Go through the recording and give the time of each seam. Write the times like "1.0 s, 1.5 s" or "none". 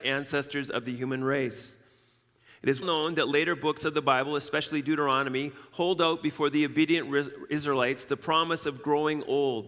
2.8 s